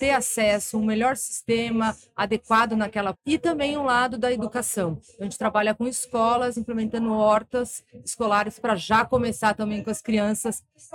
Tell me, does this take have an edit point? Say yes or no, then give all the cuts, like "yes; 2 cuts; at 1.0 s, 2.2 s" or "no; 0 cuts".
yes; 1 cut; at 3.1 s